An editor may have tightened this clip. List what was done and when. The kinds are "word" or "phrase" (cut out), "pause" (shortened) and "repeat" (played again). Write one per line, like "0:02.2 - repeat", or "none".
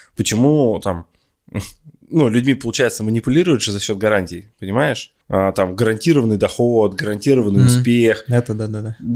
0:05.2 - pause